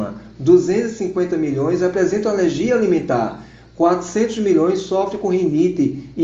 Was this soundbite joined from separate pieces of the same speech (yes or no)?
no